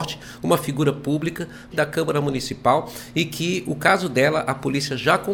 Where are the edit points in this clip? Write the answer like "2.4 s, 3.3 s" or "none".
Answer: 1.7 s